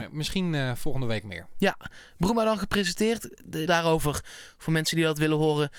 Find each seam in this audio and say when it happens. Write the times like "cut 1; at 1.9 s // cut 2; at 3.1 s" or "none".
cut 1; at 3.7 s